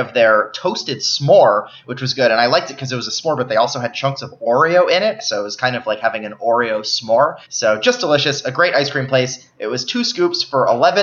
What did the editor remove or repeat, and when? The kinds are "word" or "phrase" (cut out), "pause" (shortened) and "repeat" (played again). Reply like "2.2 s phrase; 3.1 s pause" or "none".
7.4 s pause